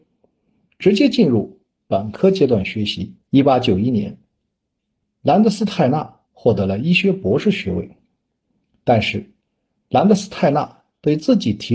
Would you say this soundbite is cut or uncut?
cut